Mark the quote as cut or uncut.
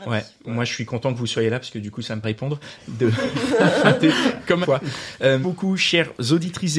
cut